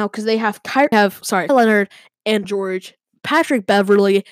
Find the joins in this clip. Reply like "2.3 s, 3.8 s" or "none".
0.9 s, 1.5 s, 2.4 s